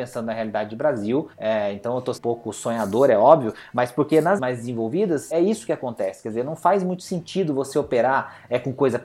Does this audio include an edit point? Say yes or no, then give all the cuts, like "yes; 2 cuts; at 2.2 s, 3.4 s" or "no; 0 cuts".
yes; 4 cuts; at 1.3 s, 2.2 s, 4.4 s, 5.3 s